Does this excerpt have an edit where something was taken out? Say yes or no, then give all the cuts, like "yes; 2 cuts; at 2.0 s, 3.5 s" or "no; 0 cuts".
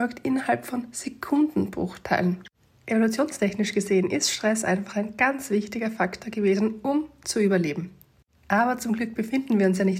no; 0 cuts